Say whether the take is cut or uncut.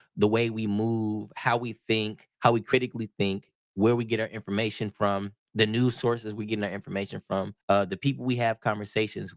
cut